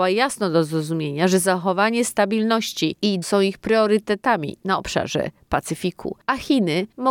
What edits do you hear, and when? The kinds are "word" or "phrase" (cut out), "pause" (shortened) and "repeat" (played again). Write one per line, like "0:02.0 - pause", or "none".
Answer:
0:03.2 - word